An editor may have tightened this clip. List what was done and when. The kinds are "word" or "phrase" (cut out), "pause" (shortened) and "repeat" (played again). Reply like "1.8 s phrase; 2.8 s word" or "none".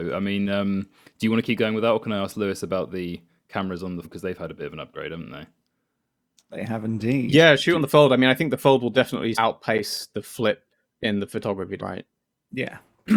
4.0 s word; 9.3 s word; 11.8 s word